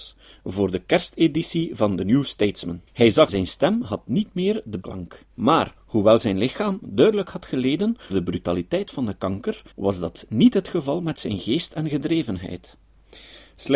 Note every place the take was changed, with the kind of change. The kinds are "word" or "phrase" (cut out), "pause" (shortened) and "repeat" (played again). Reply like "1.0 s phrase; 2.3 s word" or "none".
2.9 s pause; 3.3 s phrase; 4.8 s phrase; 5.3 s pause; 8.1 s word; 9.7 s pause